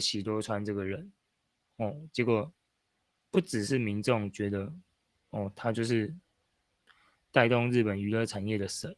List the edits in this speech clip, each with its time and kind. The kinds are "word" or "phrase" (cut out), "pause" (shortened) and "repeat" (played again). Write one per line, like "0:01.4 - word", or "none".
none